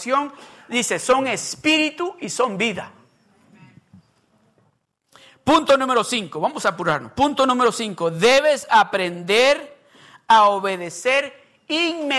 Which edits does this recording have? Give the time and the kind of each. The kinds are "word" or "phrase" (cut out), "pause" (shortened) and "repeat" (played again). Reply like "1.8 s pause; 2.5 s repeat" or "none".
none